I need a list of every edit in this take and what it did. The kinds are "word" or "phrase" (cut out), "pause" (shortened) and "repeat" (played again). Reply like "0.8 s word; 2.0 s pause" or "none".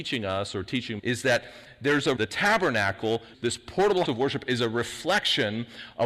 1.0 s word; 2.2 s word; 3.3 s word; 4.1 s word